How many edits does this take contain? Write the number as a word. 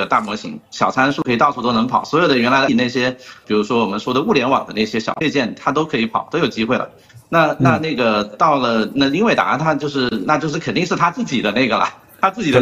two